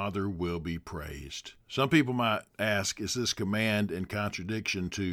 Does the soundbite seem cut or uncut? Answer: cut